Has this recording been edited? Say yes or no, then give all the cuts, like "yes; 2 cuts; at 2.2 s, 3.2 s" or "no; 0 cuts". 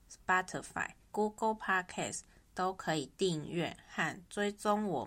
yes; 1 cut; at 1.1 s